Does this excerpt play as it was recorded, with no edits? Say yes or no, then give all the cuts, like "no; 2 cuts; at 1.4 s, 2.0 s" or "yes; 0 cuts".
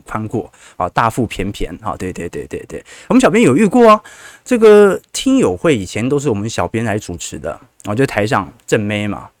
yes; 0 cuts